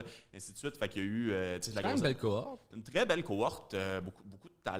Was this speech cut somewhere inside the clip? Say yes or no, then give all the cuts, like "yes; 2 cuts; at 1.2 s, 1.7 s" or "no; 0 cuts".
no; 0 cuts